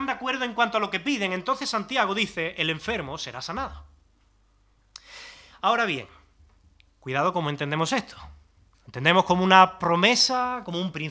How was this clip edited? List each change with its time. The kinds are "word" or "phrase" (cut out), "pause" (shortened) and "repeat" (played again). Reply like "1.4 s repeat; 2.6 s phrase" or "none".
none